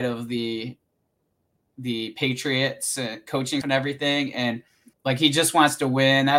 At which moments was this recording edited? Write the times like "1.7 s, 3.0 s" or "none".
3.6 s, 4.9 s